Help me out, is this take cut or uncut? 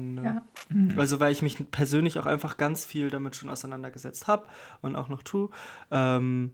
uncut